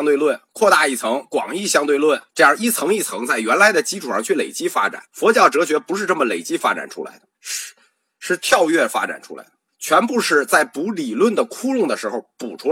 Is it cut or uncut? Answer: cut